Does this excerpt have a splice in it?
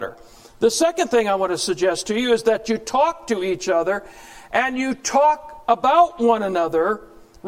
no; 0 cuts

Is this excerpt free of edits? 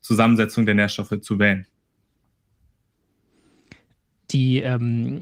no; 1 cut; at 1.2 s

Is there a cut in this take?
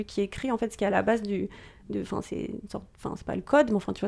no; 0 cuts

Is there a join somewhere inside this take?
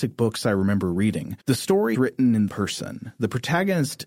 yes; 3 cuts; at 1.4 s, 1.9 s, 2.5 s

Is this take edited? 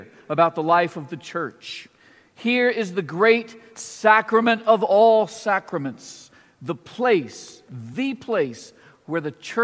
no; 0 cuts

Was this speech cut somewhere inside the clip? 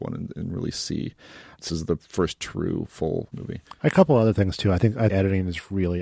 yes; 3 cuts; at 1.7 s, 3.3 s, 5.1 s

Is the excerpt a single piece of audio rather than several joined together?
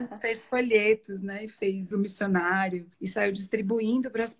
no; 2 cuts; at 1.9 s, 2.9 s

